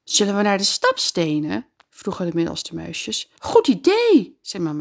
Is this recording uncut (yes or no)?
no